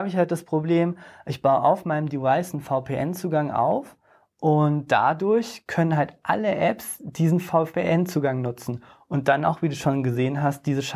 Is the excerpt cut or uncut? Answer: uncut